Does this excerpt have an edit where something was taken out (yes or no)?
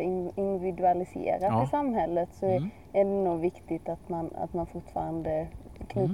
no